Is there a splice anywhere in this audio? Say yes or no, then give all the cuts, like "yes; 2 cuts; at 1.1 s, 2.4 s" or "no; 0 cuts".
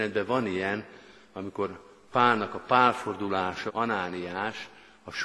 yes; 1 cut; at 3.7 s